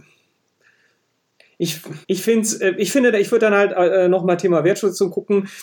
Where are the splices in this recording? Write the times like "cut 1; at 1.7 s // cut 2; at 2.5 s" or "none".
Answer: cut 1; at 2.0 s